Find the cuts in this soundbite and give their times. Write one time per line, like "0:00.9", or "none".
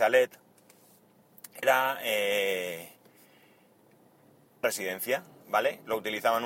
0:01.6
0:04.6